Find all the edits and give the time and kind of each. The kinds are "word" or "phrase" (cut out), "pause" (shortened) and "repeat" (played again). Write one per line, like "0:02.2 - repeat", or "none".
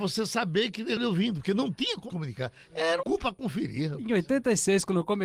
0:01.0 - word
0:02.1 - word
0:03.0 - word